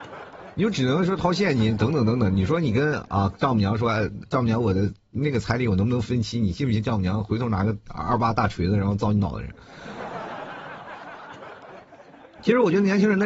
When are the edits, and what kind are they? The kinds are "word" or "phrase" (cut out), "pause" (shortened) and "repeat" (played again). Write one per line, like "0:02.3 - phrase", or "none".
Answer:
0:07.8 - pause